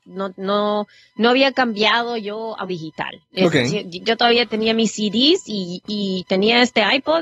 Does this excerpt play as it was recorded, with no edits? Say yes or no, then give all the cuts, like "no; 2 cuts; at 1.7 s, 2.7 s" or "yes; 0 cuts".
no; 1 cut; at 2.7 s